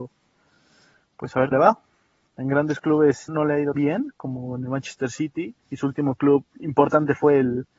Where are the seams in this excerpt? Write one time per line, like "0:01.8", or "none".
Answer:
0:01.5
0:03.3
0:03.8
0:05.6

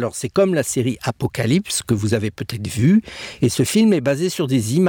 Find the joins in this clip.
none

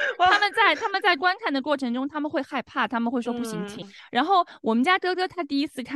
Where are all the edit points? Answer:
0:03.8

